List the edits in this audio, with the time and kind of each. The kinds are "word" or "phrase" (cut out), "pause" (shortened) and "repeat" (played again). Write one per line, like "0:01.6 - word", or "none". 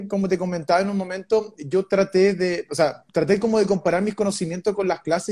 0:03.1 - pause